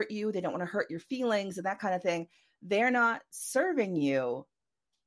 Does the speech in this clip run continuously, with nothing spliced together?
yes; 0 cuts

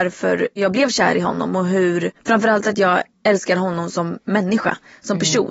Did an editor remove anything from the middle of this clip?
yes; 2 cuts; at 2.2 s, 3.1 s

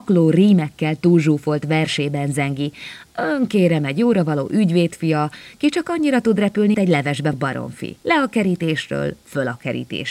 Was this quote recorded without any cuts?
no; 3 cuts; at 6.7 s, 7.3 s, 8.0 s

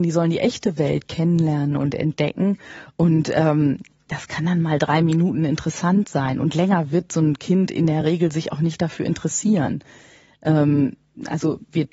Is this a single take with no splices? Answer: yes; 0 cuts

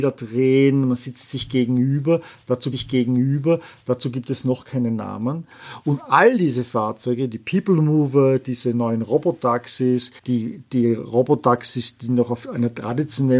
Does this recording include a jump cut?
yes; 2 cuts; at 2.7 s, 10.2 s

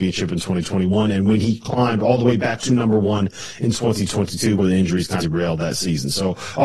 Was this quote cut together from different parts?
yes; 3 cuts; at 2.6 s, 4.6 s, 5.2 s

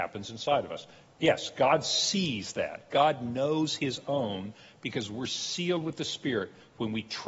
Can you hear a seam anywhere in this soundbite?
no; 0 cuts

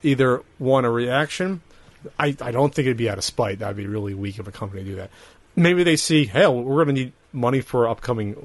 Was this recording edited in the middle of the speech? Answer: no; 0 cuts

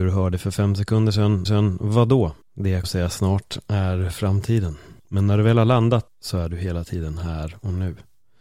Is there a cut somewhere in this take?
yes; 5 cuts; at 1.5 s, 2.4 s, 2.8 s, 5.0 s, 6.1 s

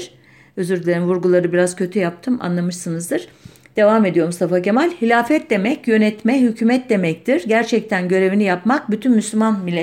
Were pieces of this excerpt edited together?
no; 0 cuts

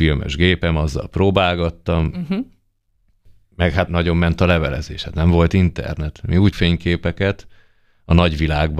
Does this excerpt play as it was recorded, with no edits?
no; 2 cuts; at 3.9 s, 6.5 s

